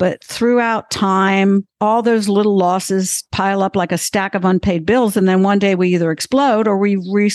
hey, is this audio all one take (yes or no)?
no